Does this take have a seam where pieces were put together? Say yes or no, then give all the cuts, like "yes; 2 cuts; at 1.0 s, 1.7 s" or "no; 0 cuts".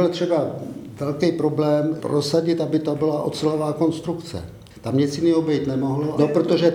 yes; 1 cut; at 4.7 s